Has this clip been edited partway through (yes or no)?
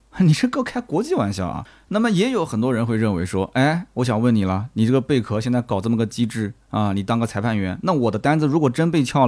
no